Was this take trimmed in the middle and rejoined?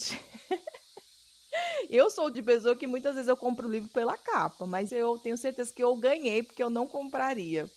yes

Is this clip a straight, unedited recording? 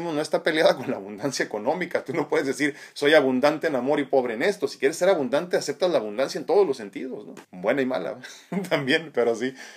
no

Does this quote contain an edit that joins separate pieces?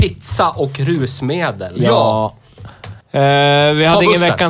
yes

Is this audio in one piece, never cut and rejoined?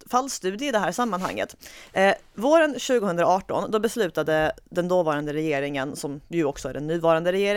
no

